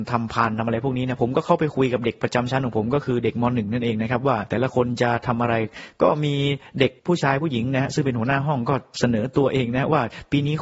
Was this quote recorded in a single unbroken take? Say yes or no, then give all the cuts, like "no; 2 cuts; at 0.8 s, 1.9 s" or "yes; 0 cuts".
no; 1 cut; at 7.0 s